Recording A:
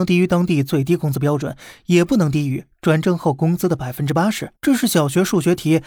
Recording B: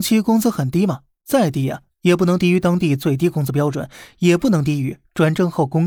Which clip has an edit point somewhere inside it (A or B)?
A